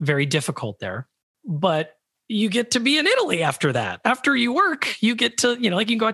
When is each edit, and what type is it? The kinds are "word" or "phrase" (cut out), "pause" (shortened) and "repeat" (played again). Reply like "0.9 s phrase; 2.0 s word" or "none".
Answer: 2.0 s pause